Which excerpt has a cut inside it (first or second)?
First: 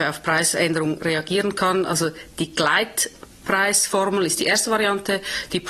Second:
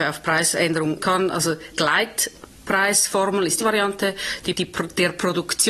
second